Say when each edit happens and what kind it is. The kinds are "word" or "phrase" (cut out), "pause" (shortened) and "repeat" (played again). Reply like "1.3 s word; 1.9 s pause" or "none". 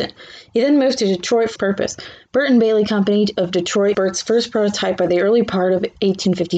1.6 s word; 3.9 s word